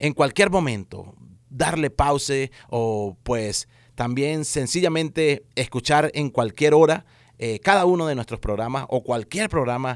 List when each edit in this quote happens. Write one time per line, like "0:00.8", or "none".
none